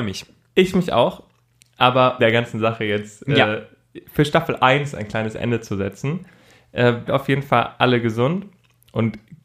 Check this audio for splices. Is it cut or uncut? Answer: cut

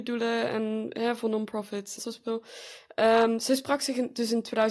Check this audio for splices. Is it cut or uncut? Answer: cut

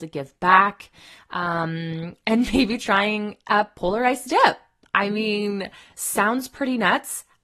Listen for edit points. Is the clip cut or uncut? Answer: uncut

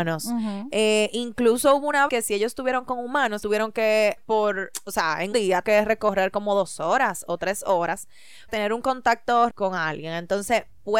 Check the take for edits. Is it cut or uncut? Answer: cut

